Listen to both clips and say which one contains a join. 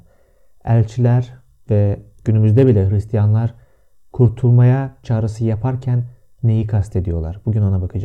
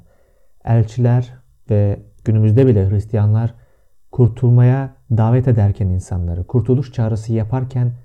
first; 1 cut; at 5.0 s

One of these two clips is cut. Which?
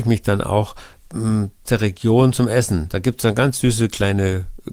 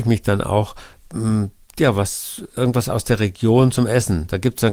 first; 1 cut; at 1.6 s

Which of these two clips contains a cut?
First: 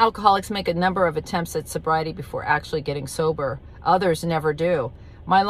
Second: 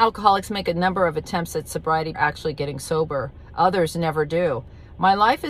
second; 1 cut; at 2.1 s

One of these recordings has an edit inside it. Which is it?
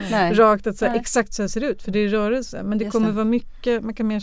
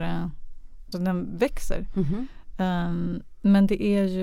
second; 1 cut; at 0.9 s

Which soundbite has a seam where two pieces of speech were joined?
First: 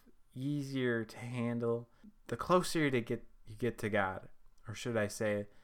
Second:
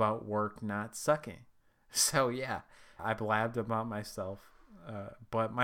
second; 2 cuts; at 1.6 s, 3.0 s

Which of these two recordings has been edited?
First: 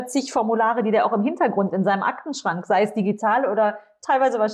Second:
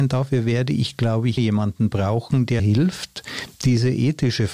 second; 2 cuts; at 1.4 s, 2.6 s

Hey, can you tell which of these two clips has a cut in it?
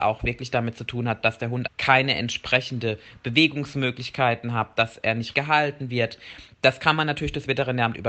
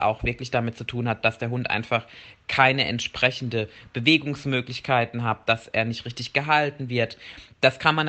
first; 2 cuts; at 1.7 s, 5.3 s

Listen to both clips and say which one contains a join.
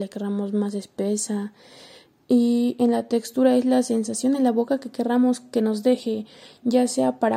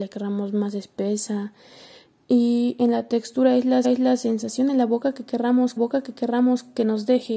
second; 2 cuts; at 3.8 s, 5.8 s

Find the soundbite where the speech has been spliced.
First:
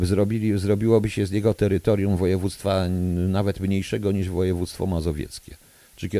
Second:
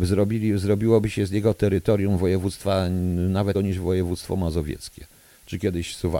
second; 1 cut; at 3.5 s

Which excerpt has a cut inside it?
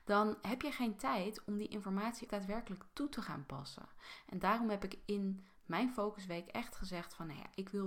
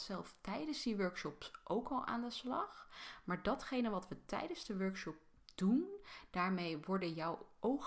first; 1 cut; at 2.3 s

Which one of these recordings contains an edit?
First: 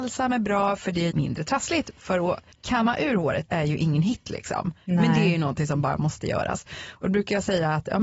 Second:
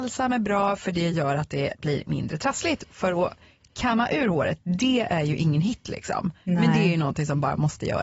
first; 3 cuts; at 1.1 s, 2.5 s, 3.5 s

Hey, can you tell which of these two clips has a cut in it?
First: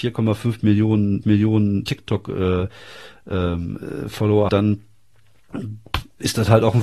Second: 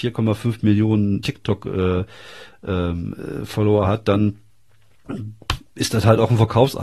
first; 2 cuts; at 1.2 s, 4.5 s

